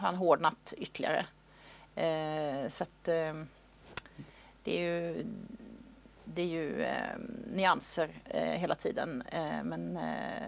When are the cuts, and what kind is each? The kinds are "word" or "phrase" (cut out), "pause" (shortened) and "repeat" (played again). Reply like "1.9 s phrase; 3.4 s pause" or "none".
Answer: none